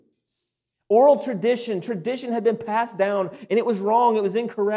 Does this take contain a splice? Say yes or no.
no